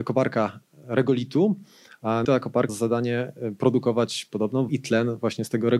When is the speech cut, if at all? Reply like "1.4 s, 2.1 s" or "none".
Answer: 2.2 s, 2.7 s, 4.7 s